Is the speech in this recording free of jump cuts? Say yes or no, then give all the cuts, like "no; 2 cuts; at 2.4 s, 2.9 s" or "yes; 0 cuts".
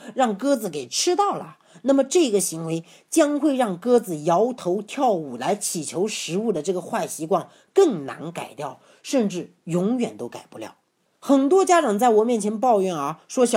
yes; 0 cuts